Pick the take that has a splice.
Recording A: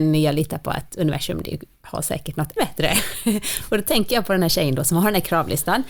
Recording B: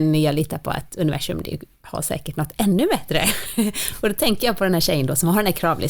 A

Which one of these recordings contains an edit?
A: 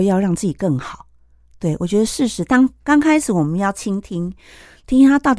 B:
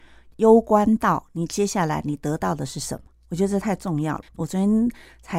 B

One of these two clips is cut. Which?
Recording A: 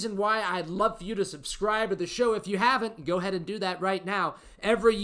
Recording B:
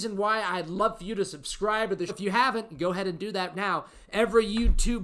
B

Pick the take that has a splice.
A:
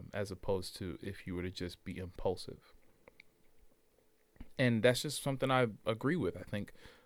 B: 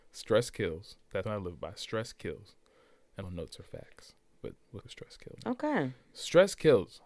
B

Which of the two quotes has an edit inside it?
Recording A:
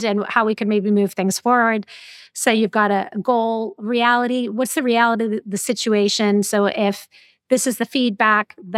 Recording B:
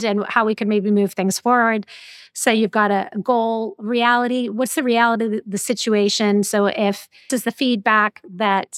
B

